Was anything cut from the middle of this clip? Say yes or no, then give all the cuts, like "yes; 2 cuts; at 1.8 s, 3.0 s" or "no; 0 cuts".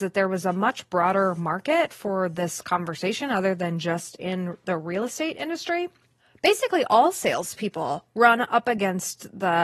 no; 0 cuts